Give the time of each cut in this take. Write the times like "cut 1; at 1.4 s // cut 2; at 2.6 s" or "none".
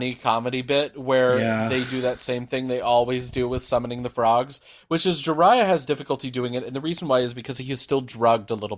none